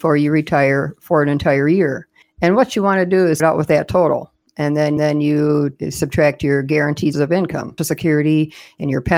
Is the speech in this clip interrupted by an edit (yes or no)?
yes